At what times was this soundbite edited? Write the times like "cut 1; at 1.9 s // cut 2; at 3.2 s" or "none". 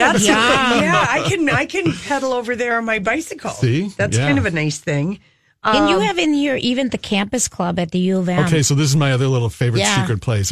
none